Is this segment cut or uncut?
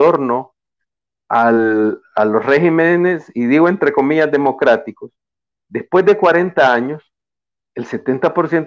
uncut